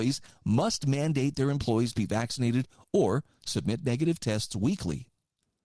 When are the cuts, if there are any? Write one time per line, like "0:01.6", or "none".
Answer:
none